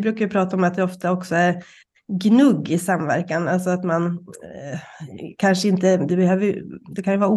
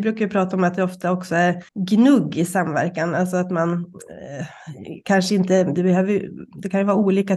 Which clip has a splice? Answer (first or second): second